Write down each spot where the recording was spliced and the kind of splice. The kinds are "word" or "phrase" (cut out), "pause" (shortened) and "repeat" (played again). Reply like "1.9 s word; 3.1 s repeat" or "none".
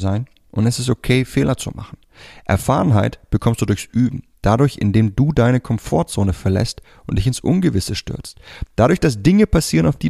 none